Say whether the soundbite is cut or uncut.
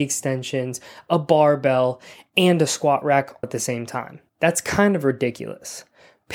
cut